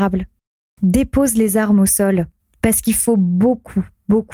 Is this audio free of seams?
no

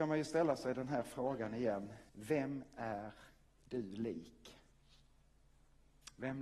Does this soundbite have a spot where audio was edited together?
yes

